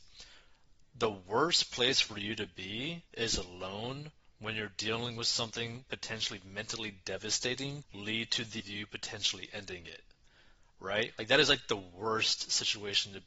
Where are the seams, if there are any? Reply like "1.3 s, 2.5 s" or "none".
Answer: 3.1 s, 7.8 s, 8.6 s